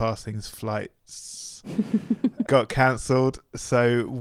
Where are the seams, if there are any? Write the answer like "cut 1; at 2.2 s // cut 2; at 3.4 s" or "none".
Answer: cut 1; at 2.5 s